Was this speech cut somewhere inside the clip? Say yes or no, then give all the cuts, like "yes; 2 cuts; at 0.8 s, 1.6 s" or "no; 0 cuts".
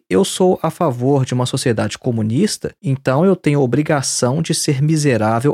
yes; 1 cut; at 2.8 s